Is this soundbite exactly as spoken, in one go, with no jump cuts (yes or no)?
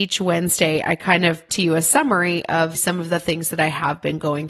no